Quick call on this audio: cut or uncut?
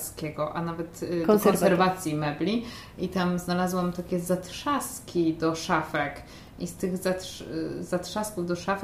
uncut